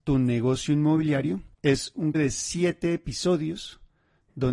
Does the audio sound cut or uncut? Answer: cut